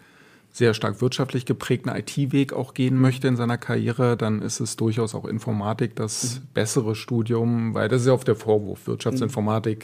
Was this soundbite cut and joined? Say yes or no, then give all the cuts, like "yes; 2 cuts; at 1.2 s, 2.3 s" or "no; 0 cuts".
no; 0 cuts